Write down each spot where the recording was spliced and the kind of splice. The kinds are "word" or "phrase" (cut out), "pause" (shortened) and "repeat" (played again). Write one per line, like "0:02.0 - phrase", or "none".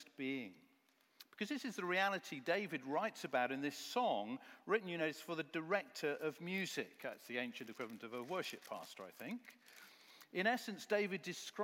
none

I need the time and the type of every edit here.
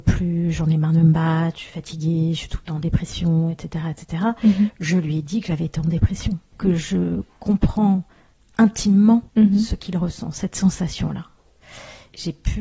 0:09.3 - pause

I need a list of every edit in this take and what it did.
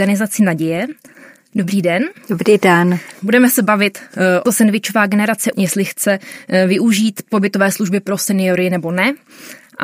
0:04.5 - phrase
0:05.5 - word

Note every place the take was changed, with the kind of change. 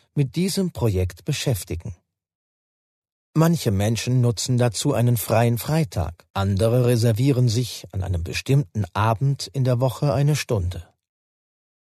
0:06.3 - pause

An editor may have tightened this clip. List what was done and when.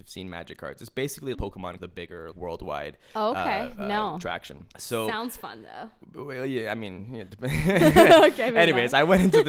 0:01.3 - word
0:01.8 - phrase
0:02.3 - word
0:04.7 - pause

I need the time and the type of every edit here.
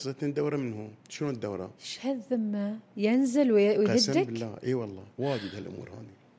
0:01.0 - pause
0:01.8 - pause
0:05.1 - pause

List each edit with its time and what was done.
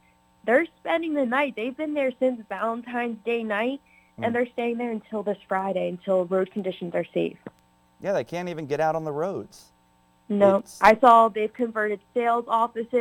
none

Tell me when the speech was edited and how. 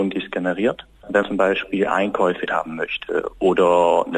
0:01.2 - word
0:02.5 - word

